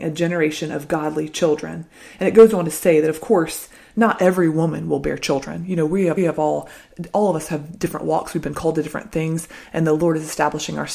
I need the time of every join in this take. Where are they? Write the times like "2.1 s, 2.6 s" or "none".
6.2 s